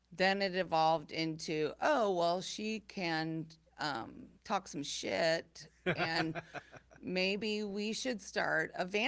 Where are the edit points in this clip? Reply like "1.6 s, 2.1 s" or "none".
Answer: 4.4 s

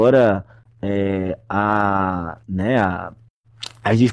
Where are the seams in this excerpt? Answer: 2.4 s

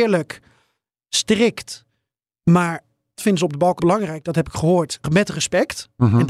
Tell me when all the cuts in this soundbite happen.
3.2 s, 3.8 s, 5.0 s

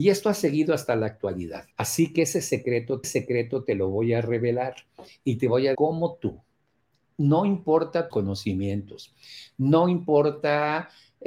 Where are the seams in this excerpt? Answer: 1.7 s, 3.0 s, 5.7 s, 8.1 s

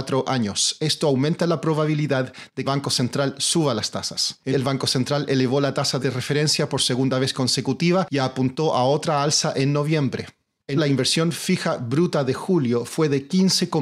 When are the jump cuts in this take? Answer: 2.6 s, 4.5 s, 6.0 s, 10.8 s

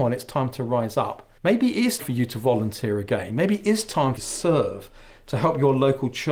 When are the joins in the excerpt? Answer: 1.4 s, 2.0 s, 4.2 s

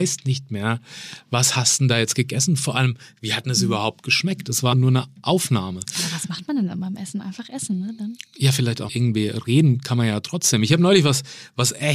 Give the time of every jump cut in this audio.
4.7 s, 8.9 s

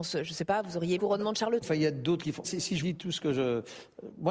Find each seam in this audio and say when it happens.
1.0 s, 1.6 s, 2.4 s, 2.8 s

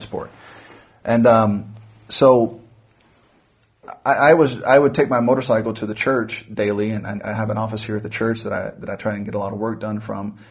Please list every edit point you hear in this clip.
7.2 s

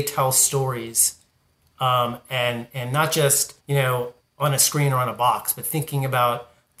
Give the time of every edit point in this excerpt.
3.6 s, 4.2 s

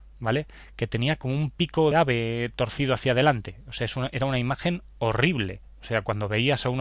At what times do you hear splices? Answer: 1.9 s

